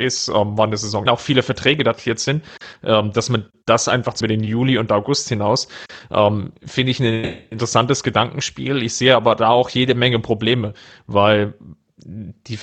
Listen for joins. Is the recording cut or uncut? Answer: cut